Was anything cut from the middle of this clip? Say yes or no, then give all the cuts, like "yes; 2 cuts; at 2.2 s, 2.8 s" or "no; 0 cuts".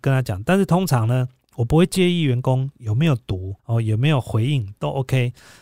yes; 1 cut; at 3.6 s